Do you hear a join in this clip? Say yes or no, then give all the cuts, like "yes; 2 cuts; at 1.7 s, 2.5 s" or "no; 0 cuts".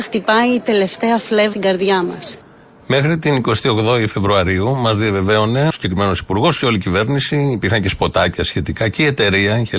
yes; 2 cuts; at 1.5 s, 5.7 s